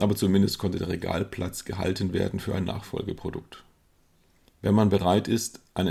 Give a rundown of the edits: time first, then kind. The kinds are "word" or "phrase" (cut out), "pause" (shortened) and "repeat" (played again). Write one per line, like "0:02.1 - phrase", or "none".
none